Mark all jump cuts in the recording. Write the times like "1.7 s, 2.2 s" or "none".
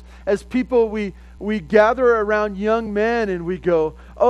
none